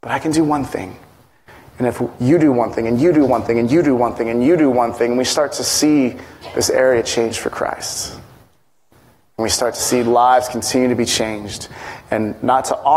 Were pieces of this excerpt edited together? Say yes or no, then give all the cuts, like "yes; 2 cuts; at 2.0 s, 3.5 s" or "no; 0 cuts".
no; 0 cuts